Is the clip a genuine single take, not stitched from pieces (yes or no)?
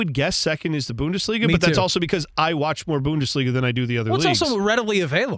yes